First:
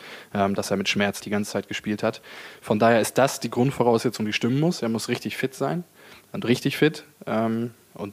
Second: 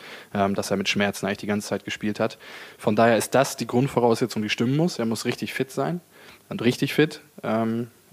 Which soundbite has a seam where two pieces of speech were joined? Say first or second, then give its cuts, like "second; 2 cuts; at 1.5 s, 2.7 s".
first; 1 cut; at 1.2 s